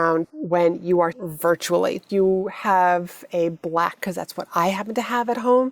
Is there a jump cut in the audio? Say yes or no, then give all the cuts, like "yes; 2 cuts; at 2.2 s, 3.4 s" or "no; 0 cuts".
yes; 3 cuts; at 1.1 s, 2.1 s, 4.0 s